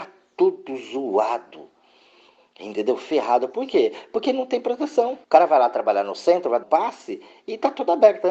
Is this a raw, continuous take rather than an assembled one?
no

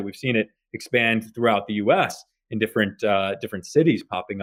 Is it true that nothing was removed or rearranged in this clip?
yes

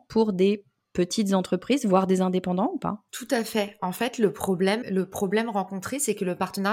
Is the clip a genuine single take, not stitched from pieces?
no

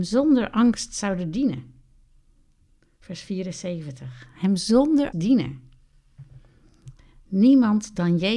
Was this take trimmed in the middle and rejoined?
yes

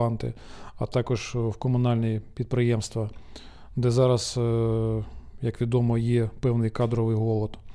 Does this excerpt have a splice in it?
no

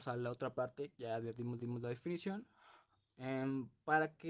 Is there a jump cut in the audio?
yes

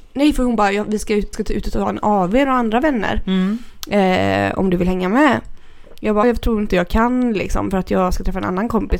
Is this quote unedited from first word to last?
no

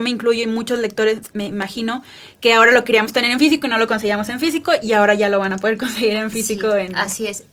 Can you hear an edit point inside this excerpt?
no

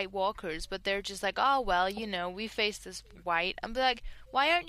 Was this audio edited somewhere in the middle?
no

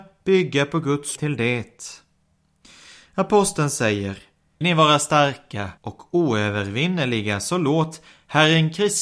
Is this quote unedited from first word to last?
no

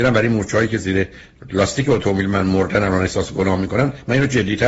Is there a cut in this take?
no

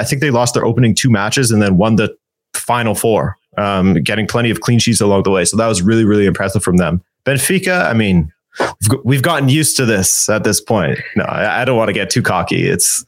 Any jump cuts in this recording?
no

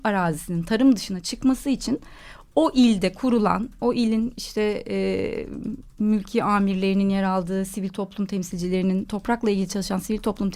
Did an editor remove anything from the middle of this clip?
no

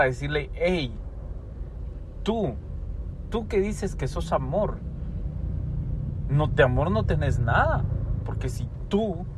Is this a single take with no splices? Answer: yes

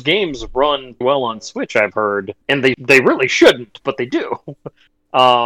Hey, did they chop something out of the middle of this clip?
yes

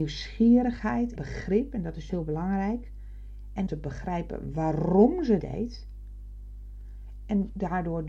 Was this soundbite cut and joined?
yes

